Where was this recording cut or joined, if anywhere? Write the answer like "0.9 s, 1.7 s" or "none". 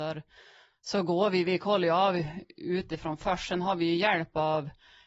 none